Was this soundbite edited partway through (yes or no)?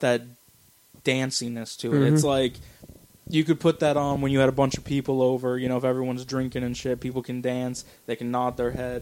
no